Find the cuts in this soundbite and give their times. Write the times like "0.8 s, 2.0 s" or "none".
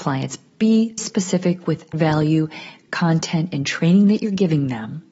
1.0 s, 1.9 s